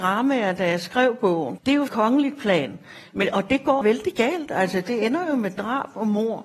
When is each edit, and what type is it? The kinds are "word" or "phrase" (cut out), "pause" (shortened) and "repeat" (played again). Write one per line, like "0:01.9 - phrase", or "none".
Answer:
0:01.6 - word
0:01.9 - phrase
0:03.8 - word